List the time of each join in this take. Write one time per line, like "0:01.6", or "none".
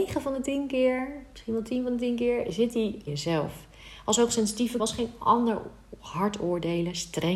0:03.1
0:04.8

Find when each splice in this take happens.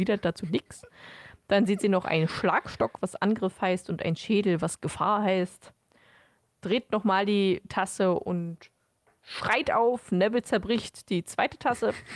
none

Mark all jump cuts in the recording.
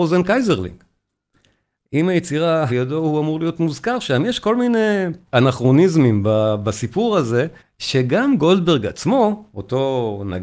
0:02.7
0:05.3
0:07.6

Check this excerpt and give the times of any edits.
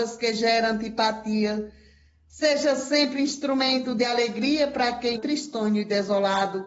0:05.1

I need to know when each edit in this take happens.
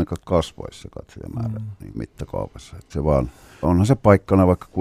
0:01.9
0:02.9
0:03.6

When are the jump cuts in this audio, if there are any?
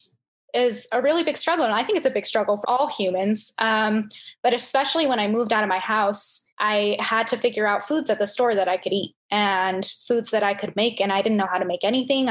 0:02.6
0:06.5

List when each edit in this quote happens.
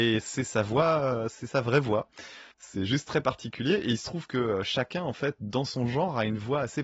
0:02.5

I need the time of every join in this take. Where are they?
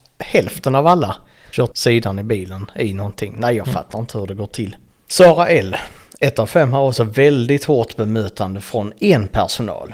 0:01.7

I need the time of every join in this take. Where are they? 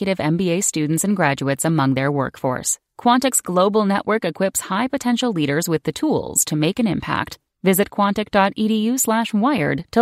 none

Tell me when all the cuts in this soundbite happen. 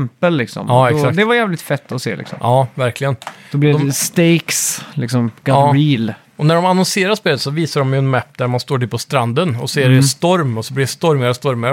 none

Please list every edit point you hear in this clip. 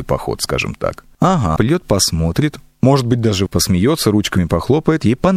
0:01.6
0:03.5

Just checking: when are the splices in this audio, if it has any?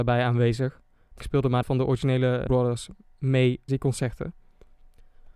0:01.2
0:01.6
0:02.5
0:03.7

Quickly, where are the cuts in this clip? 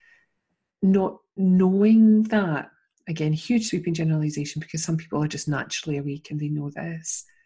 none

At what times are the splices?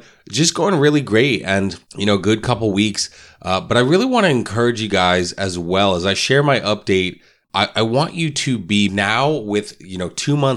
0:01.9
0:08.9

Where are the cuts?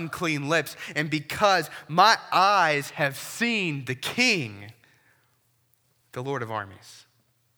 none

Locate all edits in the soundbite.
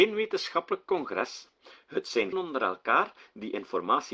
0:02.3

